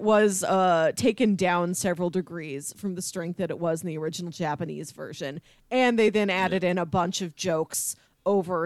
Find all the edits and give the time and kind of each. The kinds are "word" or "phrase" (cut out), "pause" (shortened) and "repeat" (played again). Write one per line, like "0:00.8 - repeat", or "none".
none